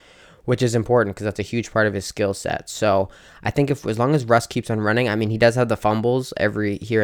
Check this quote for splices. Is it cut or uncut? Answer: uncut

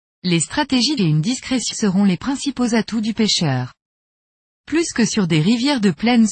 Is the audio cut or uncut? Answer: cut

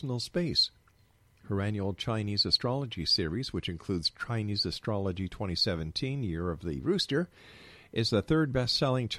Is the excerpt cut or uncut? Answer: uncut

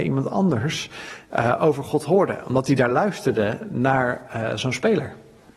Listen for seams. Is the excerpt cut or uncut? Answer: uncut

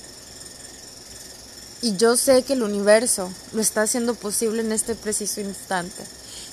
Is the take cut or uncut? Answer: uncut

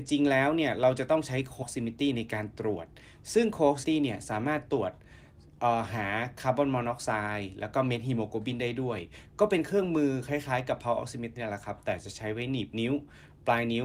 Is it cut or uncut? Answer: cut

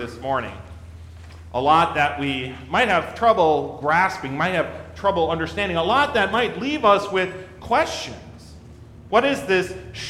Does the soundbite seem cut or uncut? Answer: uncut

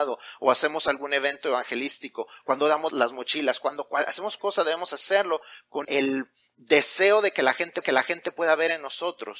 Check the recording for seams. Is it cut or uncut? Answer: cut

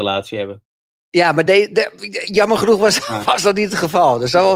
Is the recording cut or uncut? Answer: uncut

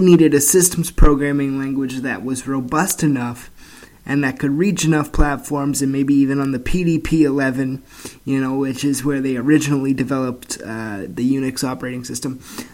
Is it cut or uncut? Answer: uncut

